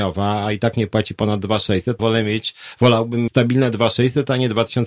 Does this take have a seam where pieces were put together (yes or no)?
yes